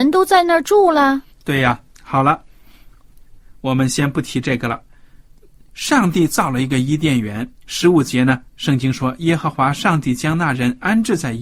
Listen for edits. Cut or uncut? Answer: cut